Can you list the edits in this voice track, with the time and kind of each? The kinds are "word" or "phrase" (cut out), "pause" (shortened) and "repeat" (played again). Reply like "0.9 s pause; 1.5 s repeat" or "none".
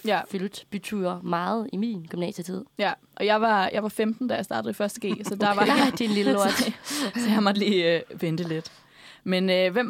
none